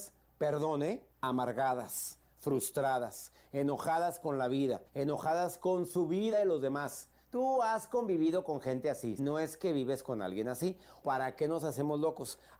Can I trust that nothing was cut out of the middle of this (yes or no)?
no